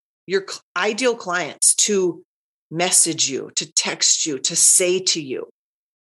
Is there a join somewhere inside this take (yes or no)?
no